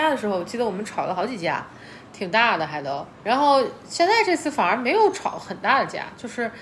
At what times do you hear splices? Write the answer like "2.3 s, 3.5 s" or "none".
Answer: 3.1 s